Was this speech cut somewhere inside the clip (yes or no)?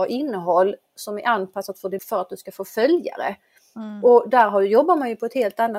yes